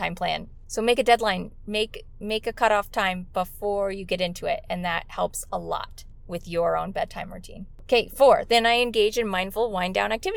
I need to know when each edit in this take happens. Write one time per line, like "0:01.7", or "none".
none